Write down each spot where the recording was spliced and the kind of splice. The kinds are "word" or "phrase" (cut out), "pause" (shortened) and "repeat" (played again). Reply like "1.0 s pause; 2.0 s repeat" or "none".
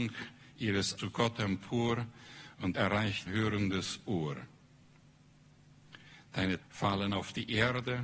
1.0 s word; 2.7 s word; 3.3 s word; 6.6 s word

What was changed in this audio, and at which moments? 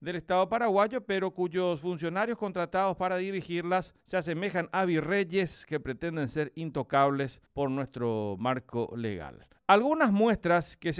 4.0 s pause; 7.5 s pause; 9.6 s pause

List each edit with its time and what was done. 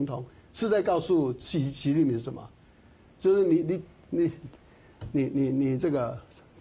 none

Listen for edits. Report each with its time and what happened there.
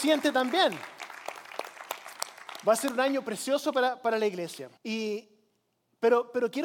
4.8 s pause

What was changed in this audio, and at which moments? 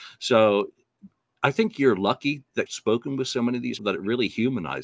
2.7 s word; 3.8 s word

